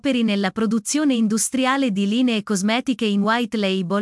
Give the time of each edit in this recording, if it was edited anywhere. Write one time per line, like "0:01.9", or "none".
none